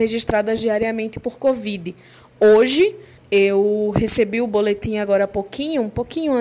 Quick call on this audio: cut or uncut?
cut